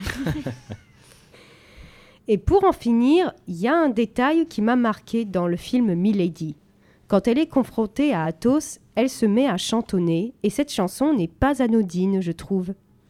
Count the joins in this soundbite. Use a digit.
0